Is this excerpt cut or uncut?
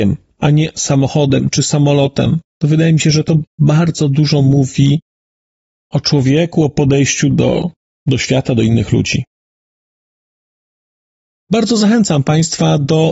uncut